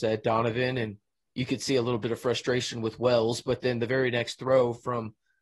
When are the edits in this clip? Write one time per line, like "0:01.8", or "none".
none